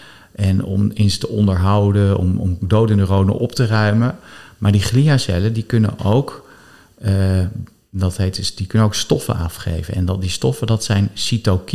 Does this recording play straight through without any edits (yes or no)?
yes